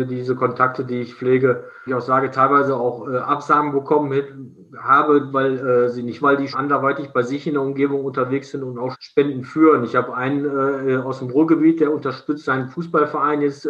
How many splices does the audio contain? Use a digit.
5